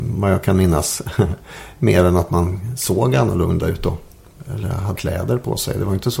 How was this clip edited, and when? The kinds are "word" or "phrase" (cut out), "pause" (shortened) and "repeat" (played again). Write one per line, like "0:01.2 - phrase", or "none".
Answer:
0:04.9 - word

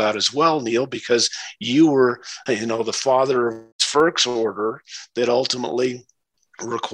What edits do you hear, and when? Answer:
0:02.5 - word
0:03.7 - pause

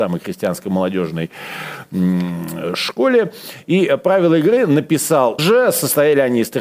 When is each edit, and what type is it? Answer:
0:05.4 - word

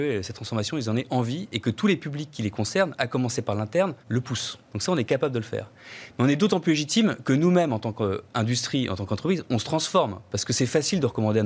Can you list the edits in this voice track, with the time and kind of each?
0:04.0 - pause
0:04.6 - pause

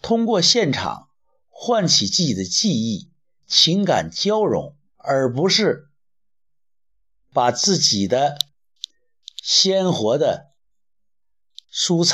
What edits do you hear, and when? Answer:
0:04.9 - pause

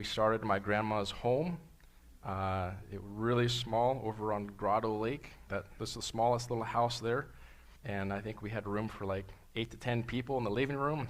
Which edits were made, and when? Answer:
0:05.5 - word
0:07.8 - pause

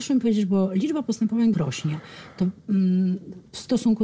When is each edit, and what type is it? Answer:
0:01.5 - word

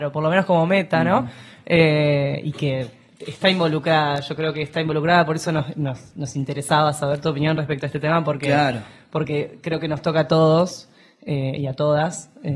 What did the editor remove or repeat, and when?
none

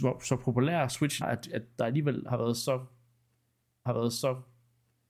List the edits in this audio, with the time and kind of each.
0:01.2 - word
0:03.9 - repeat

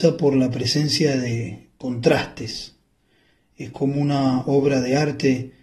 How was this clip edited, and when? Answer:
none

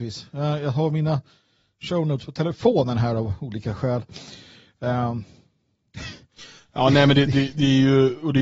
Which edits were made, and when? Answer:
none

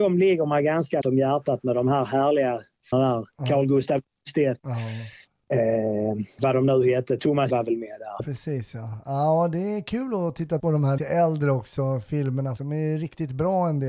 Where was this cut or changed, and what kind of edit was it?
0:01.0 - word
0:02.9 - word
0:04.6 - word
0:06.4 - word
0:07.5 - word
0:08.2 - word
0:10.6 - word
0:11.0 - word
0:12.6 - word

